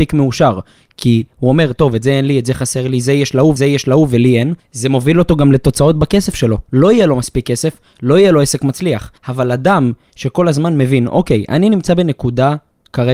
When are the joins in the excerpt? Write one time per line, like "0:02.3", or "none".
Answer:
0:03.6
0:04.6
0:09.2